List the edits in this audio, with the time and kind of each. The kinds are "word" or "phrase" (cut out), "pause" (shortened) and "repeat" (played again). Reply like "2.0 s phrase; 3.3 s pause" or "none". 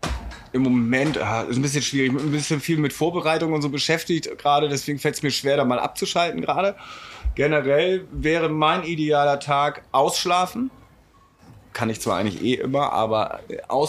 9.9 s pause